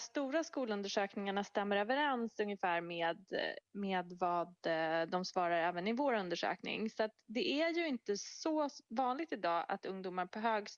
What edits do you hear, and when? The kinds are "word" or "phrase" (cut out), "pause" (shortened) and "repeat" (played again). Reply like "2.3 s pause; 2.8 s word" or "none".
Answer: none